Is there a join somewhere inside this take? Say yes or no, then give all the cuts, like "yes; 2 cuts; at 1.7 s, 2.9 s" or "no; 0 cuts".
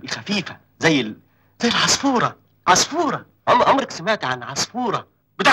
no; 0 cuts